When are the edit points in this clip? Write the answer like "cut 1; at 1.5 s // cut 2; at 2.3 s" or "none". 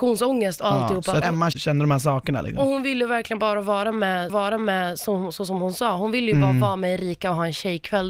cut 1; at 1.2 s // cut 2; at 1.5 s // cut 3; at 4.3 s